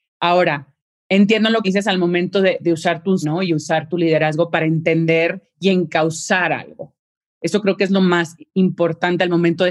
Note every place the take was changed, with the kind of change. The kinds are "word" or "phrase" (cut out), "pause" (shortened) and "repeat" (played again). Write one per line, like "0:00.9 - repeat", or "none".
0:01.6 - word
0:02.6 - word
0:03.2 - word